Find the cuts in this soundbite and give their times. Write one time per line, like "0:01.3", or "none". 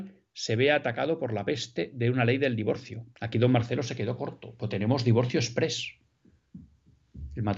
0:03.1